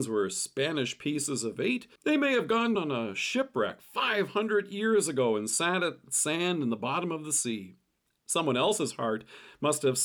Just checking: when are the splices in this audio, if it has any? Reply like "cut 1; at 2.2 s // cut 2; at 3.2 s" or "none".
cut 1; at 2.0 s // cut 2; at 2.7 s